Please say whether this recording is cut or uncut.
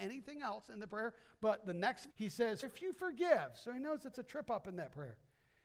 cut